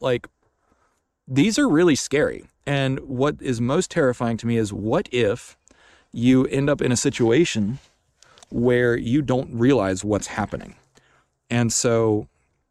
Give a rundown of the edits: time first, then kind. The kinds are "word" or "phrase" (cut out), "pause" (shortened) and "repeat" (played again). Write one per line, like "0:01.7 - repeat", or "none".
none